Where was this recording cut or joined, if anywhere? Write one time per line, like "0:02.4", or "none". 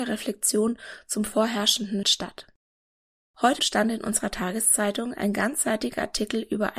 0:02.0
0:03.6